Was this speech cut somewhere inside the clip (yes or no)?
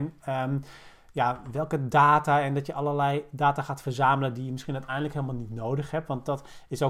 no